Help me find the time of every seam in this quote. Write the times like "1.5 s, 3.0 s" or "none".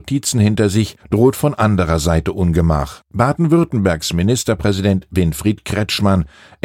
1.0 s